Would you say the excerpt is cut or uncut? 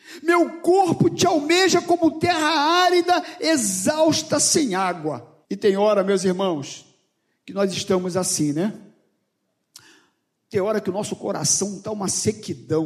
cut